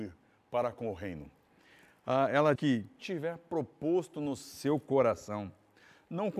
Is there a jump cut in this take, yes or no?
yes